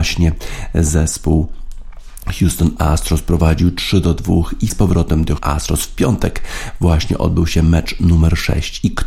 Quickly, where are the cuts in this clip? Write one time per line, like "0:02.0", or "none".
0:04.7
0:05.4